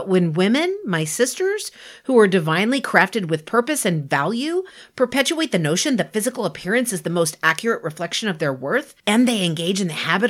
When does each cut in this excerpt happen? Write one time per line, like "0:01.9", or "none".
none